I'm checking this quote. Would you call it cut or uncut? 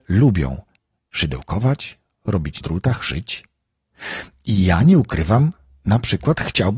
cut